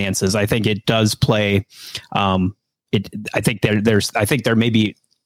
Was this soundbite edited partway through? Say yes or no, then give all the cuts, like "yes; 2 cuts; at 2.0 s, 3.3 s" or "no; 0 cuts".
no; 0 cuts